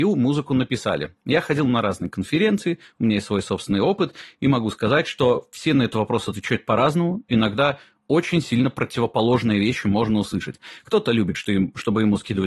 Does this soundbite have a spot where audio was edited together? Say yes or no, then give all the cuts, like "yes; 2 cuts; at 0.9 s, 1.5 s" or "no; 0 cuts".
no; 0 cuts